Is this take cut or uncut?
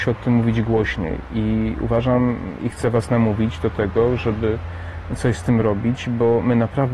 uncut